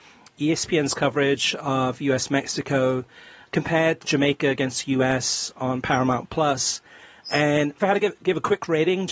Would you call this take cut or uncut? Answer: cut